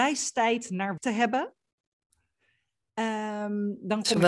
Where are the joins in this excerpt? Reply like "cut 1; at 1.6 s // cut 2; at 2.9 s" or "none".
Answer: cut 1; at 1.0 s